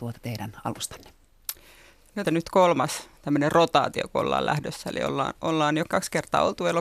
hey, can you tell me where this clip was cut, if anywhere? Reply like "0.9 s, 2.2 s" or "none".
2.2 s, 5.8 s